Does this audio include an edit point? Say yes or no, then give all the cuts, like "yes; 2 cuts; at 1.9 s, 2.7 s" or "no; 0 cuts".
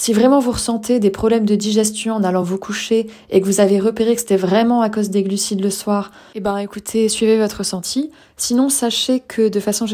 no; 0 cuts